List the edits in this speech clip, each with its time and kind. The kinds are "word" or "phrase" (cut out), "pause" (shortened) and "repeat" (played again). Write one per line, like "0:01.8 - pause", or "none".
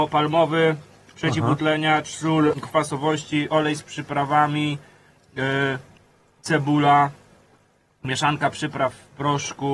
0:02.5 - word